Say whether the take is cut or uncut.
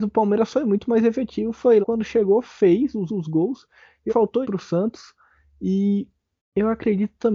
cut